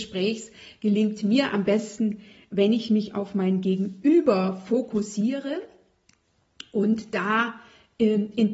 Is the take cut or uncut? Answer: uncut